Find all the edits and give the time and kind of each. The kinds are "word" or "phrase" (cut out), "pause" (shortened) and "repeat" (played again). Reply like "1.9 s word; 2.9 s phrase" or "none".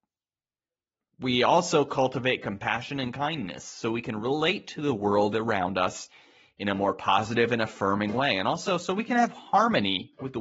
none